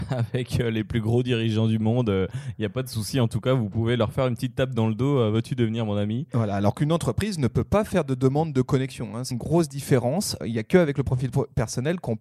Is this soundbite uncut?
no; 2 cuts; at 9.3 s, 10.4 s

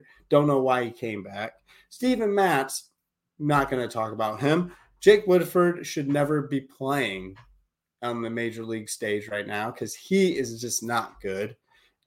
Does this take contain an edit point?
no; 0 cuts

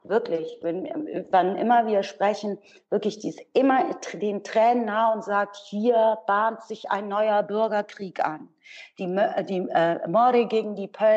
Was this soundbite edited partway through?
no; 0 cuts

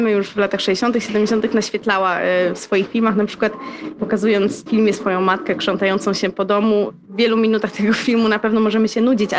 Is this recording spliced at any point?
yes; 1 cut; at 4.7 s

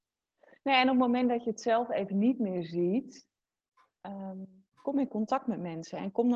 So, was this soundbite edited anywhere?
no; 0 cuts

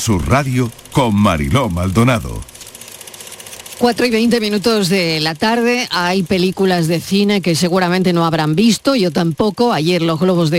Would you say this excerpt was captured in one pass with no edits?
yes; 0 cuts

